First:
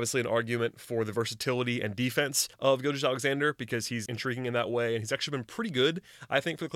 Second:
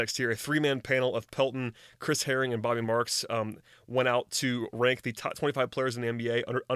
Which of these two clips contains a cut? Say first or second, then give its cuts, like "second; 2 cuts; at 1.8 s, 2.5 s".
first; 2 cuts; at 2.5 s, 4.1 s